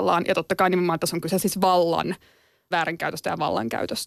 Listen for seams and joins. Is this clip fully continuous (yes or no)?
no